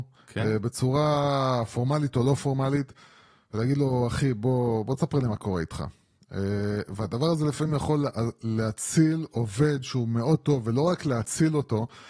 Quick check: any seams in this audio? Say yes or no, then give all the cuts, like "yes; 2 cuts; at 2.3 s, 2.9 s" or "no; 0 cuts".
no; 0 cuts